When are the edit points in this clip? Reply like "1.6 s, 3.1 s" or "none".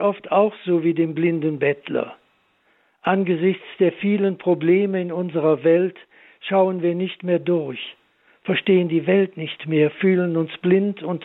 none